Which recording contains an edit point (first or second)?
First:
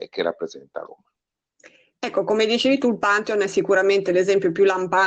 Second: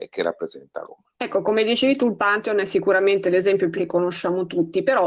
second